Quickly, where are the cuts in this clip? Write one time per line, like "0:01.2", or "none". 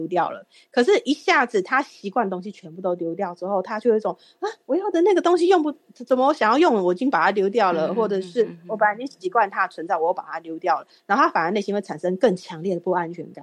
0:04.6